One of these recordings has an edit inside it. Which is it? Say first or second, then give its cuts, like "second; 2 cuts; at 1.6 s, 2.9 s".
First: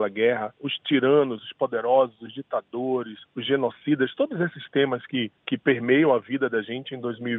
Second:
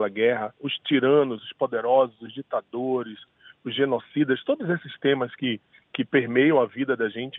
first; 2 cuts; at 3.2 s, 5.4 s